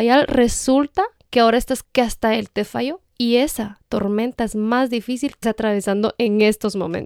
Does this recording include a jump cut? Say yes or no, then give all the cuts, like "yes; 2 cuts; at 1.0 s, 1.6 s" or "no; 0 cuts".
yes; 2 cuts; at 1.8 s, 5.4 s